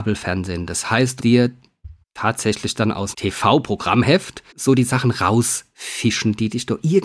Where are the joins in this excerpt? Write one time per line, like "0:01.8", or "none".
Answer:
0:01.2
0:02.0
0:03.1
0:04.5